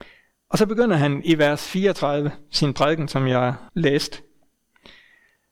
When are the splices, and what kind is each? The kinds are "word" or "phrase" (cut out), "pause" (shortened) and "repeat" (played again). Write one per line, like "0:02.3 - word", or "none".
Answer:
0:03.7 - pause